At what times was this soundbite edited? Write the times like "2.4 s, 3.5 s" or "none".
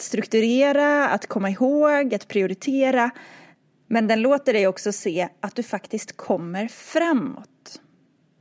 none